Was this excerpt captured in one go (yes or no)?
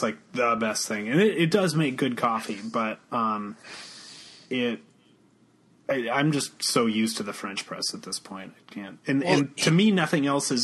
yes